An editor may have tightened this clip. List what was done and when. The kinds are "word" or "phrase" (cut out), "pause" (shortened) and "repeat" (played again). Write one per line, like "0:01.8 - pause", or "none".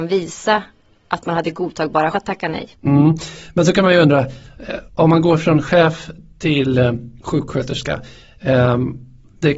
0:02.1 - word
0:02.7 - pause
0:04.9 - pause
0:07.2 - pause